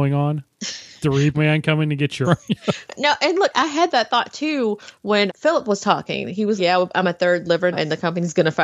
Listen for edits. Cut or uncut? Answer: cut